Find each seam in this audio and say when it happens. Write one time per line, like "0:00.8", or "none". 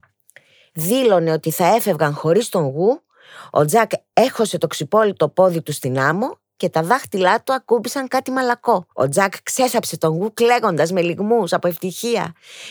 0:08.9